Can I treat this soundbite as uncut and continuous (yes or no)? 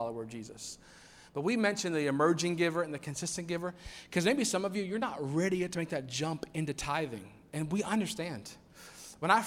yes